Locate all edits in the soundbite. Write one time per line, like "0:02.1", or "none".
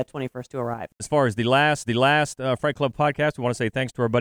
0:01.0
0:01.8

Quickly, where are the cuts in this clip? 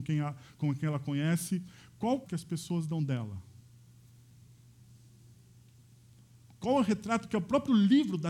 0:02.3

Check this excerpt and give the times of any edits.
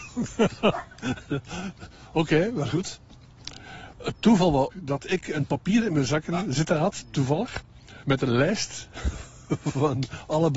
0:04.7

